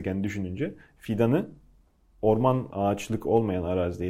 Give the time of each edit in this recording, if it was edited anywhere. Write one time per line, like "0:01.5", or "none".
0:02.7